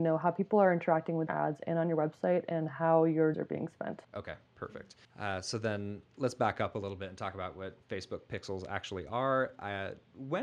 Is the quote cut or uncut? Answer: cut